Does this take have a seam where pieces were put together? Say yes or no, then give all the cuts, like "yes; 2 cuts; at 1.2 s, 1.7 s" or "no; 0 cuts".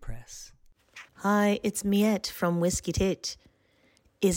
yes; 1 cut; at 1.1 s